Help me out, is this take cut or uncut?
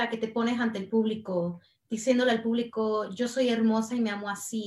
uncut